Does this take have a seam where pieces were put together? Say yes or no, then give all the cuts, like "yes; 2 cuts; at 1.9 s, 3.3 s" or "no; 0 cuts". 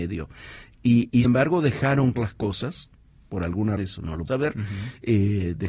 yes; 4 cuts; at 1.2 s, 2.1 s, 3.8 s, 4.3 s